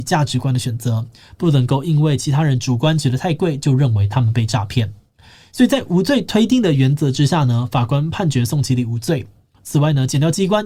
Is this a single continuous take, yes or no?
yes